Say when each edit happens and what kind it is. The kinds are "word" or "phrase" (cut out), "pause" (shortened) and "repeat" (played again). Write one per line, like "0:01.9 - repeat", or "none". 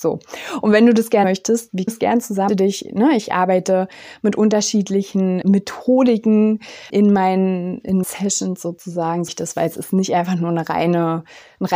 0:01.2 - word
0:01.9 - word
0:02.5 - phrase
0:05.4 - word
0:06.9 - word
0:08.0 - word
0:09.3 - word